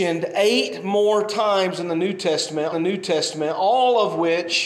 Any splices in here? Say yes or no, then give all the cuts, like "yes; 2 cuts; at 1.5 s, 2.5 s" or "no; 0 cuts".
yes; 1 cut; at 2.7 s